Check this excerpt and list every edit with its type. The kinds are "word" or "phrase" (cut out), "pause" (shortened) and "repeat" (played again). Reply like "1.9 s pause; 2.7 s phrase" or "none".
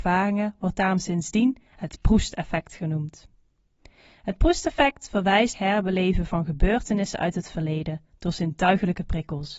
1.7 s pause; 5.5 s phrase